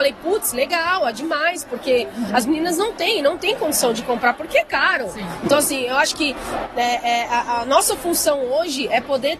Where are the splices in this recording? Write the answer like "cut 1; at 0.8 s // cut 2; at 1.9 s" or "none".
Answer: none